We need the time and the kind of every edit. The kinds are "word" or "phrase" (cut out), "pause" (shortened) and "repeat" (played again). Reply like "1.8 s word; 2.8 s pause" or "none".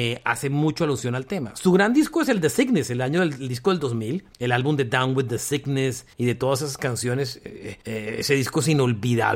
4.3 s pause; 6.1 s pause; 7.8 s pause